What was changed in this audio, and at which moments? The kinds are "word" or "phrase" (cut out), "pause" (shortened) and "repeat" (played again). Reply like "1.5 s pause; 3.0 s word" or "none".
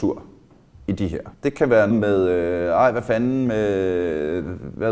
1.3 s pause; 1.9 s word